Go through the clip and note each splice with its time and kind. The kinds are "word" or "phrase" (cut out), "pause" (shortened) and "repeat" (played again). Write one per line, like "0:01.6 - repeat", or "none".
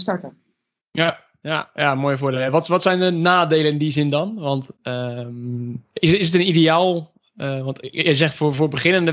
none